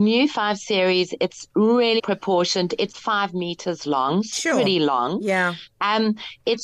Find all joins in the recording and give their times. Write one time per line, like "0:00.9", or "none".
0:02.0
0:02.9
0:04.3